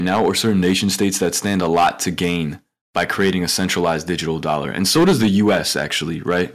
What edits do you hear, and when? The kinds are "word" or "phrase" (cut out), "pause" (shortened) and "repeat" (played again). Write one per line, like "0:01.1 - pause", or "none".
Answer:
none